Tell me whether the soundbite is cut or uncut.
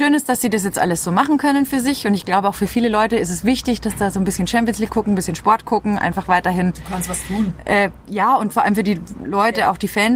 uncut